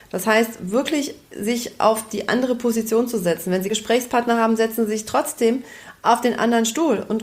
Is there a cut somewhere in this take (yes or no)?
yes